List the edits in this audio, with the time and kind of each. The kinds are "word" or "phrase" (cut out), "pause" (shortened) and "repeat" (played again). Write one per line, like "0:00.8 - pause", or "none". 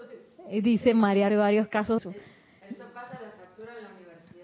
0:01.3 - phrase
0:02.0 - word